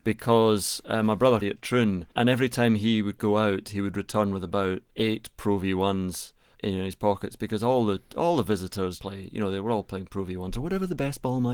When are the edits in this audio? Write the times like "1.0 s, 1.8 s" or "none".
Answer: 1.4 s, 2.1 s, 4.9 s, 6.5 s, 9.0 s